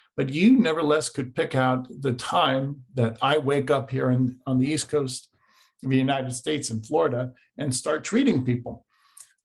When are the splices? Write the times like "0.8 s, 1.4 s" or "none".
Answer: none